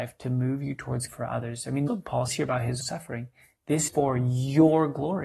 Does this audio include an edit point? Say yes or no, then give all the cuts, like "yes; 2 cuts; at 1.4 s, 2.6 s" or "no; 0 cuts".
yes; 5 cuts; at 1.1 s, 1.9 s, 2.3 s, 2.8 s, 3.9 s